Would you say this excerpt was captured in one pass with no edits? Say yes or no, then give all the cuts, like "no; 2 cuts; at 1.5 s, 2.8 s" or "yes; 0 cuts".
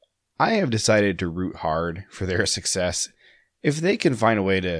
yes; 0 cuts